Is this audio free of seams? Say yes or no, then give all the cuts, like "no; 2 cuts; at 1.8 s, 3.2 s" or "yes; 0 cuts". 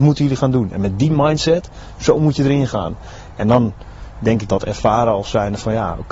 no; 1 cut; at 4.5 s